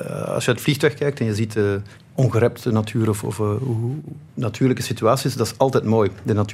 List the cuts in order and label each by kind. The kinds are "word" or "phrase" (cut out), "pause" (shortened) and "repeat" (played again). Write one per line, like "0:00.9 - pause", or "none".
0:02.0 - pause
0:04.3 - pause

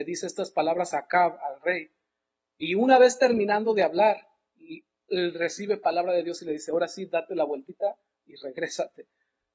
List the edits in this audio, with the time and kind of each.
none

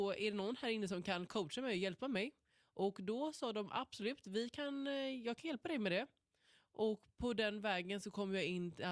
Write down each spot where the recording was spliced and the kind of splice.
none

